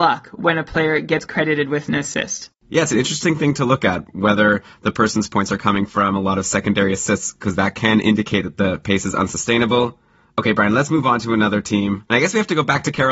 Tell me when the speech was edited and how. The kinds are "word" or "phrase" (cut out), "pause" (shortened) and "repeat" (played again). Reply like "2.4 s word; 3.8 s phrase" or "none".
none